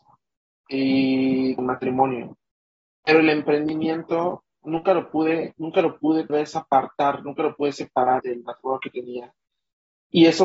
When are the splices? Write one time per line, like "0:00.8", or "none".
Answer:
0:01.6
0:06.3
0:08.2